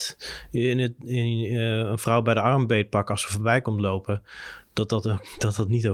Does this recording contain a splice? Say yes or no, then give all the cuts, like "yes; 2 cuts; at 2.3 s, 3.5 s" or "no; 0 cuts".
no; 0 cuts